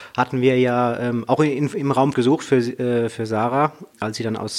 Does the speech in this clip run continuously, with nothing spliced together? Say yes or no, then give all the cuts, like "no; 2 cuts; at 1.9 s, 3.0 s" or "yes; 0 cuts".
no; 1 cut; at 2.1 s